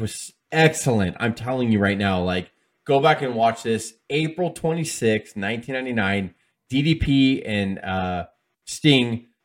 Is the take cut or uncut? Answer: uncut